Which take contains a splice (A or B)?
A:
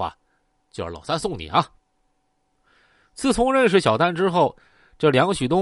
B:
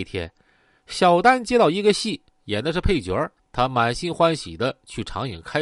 B